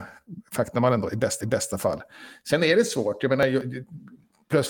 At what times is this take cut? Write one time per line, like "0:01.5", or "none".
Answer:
0:01.4